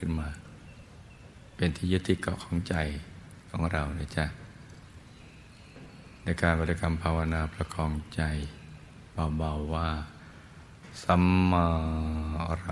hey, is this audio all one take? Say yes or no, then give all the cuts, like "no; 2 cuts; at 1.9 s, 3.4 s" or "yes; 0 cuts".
yes; 0 cuts